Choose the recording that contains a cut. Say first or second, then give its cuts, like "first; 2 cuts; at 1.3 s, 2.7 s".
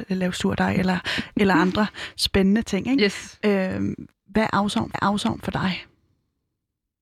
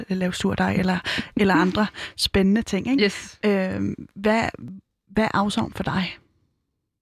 first; 2 cuts; at 4.1 s, 4.9 s